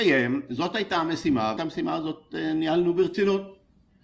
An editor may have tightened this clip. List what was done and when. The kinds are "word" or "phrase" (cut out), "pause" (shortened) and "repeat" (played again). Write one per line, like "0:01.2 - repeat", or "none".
0:01.6 - word